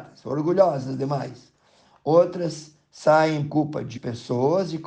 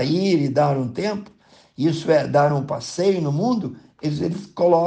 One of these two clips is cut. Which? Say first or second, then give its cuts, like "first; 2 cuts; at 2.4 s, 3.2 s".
first; 2 cuts; at 3.5 s, 4.0 s